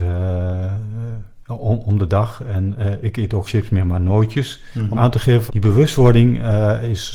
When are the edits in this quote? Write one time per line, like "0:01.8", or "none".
0:03.5
0:04.9
0:05.5